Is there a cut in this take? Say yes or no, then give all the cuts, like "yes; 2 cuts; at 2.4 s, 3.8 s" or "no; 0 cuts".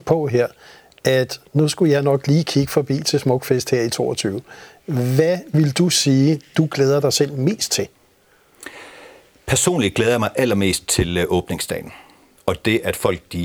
no; 0 cuts